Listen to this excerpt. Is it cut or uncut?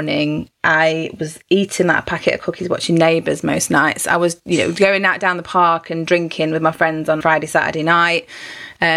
cut